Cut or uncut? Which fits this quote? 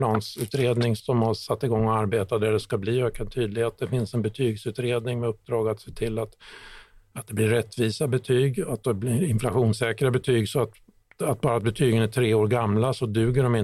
uncut